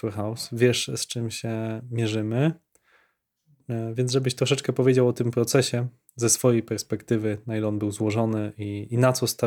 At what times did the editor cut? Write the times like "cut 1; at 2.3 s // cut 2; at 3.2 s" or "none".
none